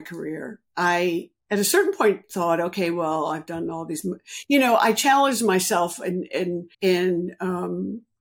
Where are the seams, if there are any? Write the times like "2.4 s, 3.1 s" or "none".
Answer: 6.7 s